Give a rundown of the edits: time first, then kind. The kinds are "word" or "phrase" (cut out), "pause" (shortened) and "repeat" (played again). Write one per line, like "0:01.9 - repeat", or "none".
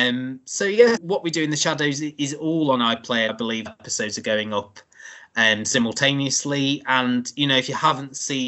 0:01.0 - word
0:03.3 - word
0:03.7 - word